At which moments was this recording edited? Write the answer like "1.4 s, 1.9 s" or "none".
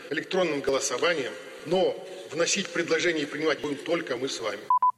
3.6 s